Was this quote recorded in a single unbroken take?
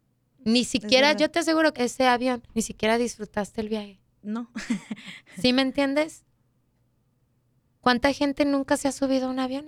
no; 3 cuts; at 1.8 s, 2.5 s, 4.1 s

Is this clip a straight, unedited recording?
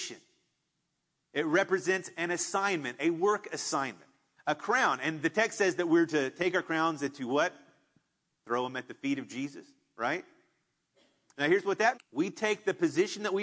no; 1 cut; at 11.9 s

